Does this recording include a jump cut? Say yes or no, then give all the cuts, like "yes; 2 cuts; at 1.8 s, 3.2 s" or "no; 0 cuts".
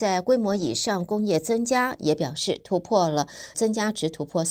yes; 1 cut; at 3.5 s